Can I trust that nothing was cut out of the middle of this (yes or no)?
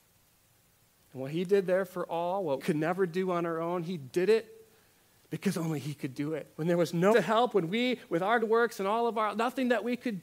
no